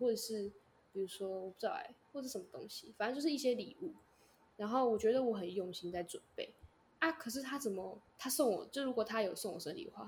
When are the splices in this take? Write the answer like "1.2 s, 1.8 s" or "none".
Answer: 8.1 s